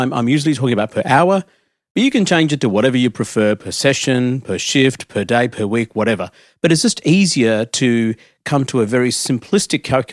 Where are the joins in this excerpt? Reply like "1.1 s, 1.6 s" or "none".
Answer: none